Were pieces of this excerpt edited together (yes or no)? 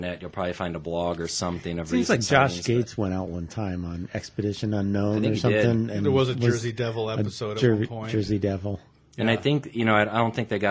no